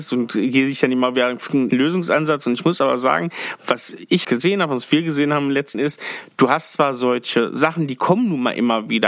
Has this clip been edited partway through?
yes; 3 cuts; at 1.7 s, 4.2 s, 5.7 s

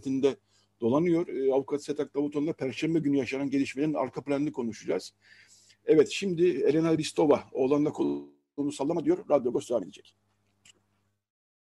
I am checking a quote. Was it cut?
no; 0 cuts

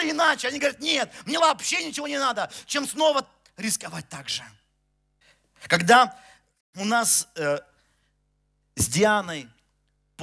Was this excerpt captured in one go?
no; 1 cut; at 1.4 s

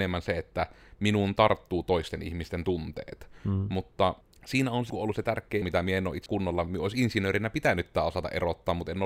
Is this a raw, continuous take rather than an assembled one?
no; 4 cuts; at 4.2 s, 4.9 s, 5.6 s, 6.3 s

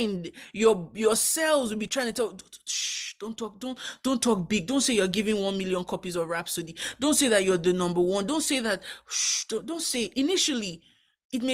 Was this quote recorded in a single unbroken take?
yes; 0 cuts

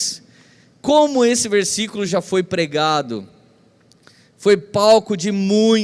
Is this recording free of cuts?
yes; 0 cuts

